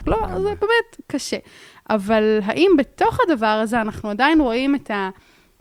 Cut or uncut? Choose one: uncut